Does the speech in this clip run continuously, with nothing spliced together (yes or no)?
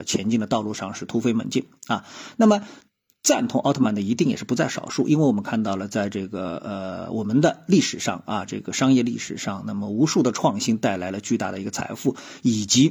yes